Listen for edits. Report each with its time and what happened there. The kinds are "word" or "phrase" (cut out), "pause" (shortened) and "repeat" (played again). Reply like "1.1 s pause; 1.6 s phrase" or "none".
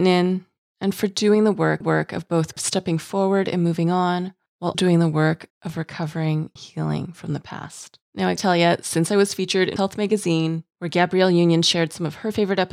1.8 s repeat; 4.7 s word; 5.5 s pause; 6.6 s word; 8.0 s pause; 8.4 s word; 9.8 s word